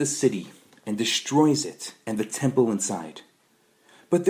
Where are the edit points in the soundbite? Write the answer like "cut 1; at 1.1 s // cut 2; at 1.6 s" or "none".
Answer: cut 1; at 2.0 s